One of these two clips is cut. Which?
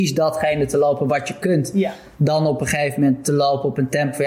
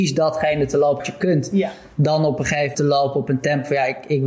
second; 2 cuts; at 1.0 s, 2.7 s

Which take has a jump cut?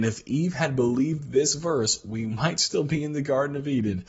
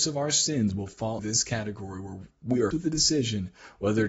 second; 2 cuts; at 1.2 s, 2.7 s

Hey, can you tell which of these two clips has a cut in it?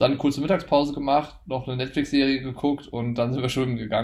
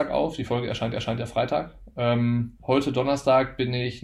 second; 2 cuts; at 0.9 s, 2.6 s

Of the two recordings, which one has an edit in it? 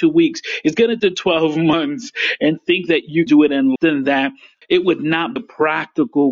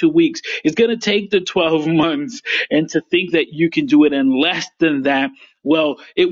first; 6 cuts; at 1.0 s, 2.6 s, 3.3 s, 3.8 s, 4.6 s, 5.4 s

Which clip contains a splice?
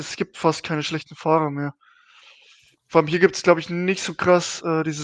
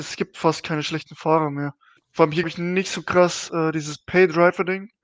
second; 2 cuts; at 2.0 s, 2.4 s

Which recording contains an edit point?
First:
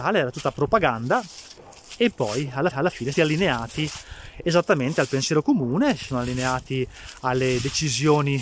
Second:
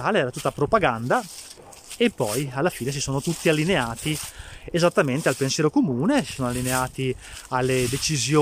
first; 2 cuts; at 2.7 s, 3.1 s

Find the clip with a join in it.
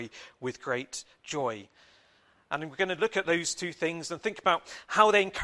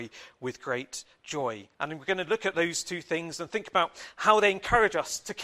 second; 1 cut; at 1.7 s

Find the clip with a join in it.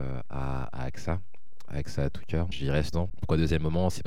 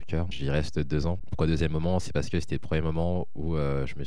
first; 1 cut; at 2.9 s

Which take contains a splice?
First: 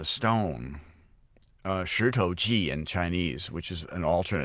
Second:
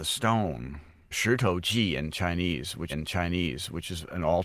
second; 2 cuts; at 1.1 s, 2.9 s

